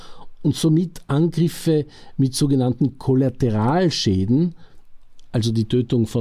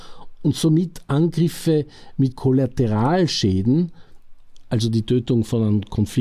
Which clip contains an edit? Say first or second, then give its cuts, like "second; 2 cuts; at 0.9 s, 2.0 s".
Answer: second; 1 cut; at 2.3 s